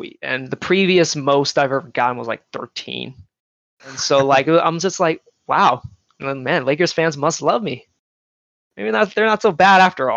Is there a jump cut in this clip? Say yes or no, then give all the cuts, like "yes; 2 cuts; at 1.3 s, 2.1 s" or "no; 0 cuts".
no; 0 cuts